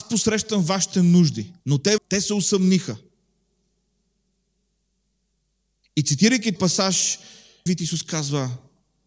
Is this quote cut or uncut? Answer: cut